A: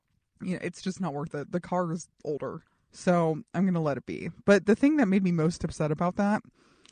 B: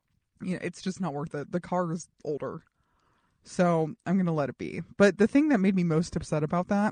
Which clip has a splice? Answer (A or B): A